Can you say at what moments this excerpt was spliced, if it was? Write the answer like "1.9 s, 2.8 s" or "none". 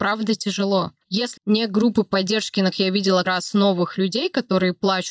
1.4 s, 2.7 s, 3.2 s, 3.9 s